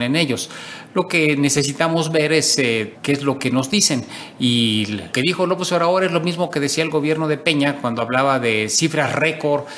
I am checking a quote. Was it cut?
yes; 2 cuts; at 2.9 s, 5.1 s

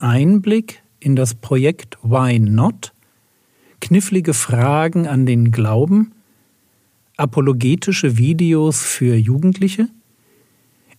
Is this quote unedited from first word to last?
yes; 0 cuts

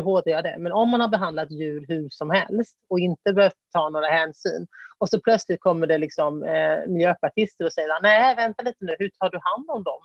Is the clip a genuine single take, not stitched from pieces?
yes; 0 cuts

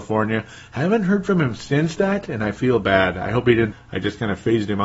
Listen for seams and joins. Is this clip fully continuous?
no; 1 cut; at 3.7 s

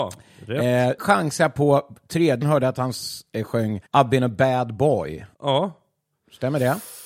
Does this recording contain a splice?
yes; 4 cuts; at 1.0 s, 2.4 s, 3.9 s, 5.3 s

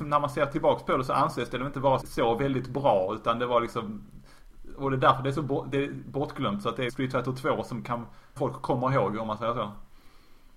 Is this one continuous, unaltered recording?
no; 3 cuts; at 2.0 s, 6.9 s, 8.4 s

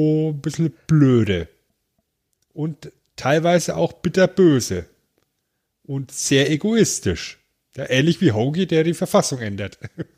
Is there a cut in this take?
no; 0 cuts

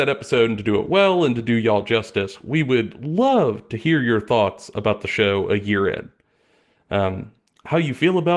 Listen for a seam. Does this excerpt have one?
no; 0 cuts

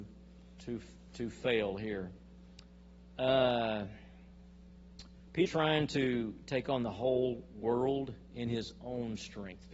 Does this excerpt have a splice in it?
yes; 1 cut; at 5.5 s

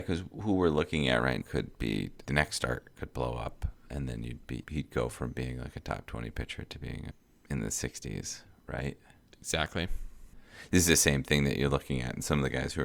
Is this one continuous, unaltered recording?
no; 3 cuts; at 1.4 s, 2.2 s, 4.6 s

